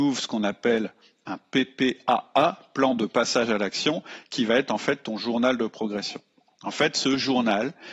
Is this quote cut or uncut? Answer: uncut